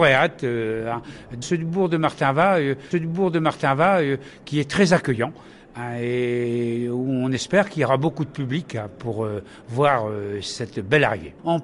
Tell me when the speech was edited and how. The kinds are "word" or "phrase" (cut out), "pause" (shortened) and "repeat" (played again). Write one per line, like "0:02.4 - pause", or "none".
0:01.4 - word
0:02.9 - repeat